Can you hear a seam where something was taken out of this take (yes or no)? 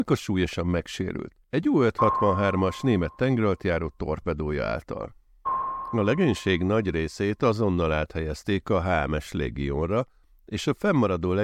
yes